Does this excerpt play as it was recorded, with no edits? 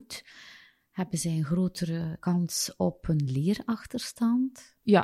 yes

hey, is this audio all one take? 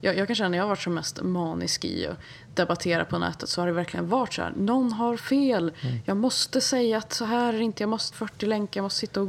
no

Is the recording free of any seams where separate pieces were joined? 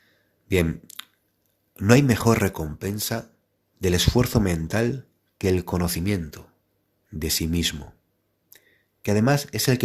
no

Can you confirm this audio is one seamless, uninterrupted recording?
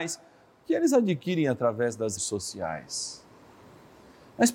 no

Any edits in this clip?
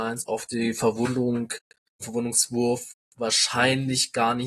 yes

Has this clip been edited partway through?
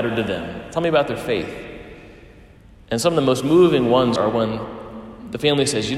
yes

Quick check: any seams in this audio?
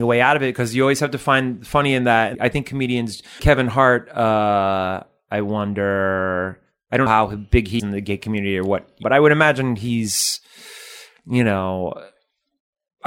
yes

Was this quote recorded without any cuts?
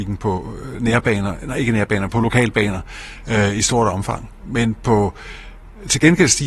yes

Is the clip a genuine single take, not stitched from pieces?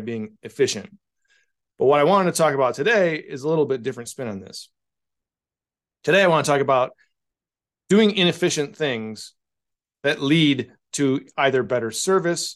yes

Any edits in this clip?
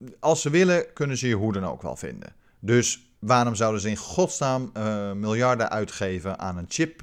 yes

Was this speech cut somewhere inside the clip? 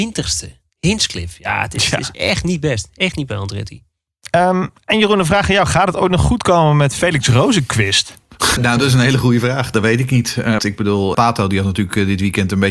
yes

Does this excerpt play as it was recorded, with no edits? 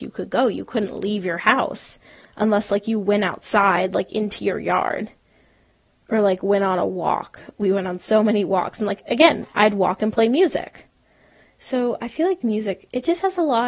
yes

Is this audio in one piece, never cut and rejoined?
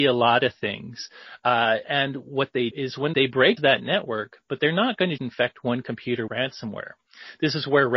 no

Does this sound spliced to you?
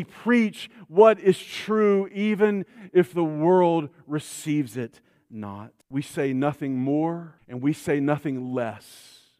yes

